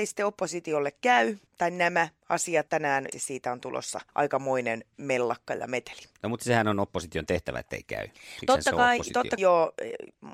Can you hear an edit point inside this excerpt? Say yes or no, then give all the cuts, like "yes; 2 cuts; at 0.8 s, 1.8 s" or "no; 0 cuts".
yes; 5 cuts; at 1.5 s, 2.7 s, 3.1 s, 4.1 s, 9.4 s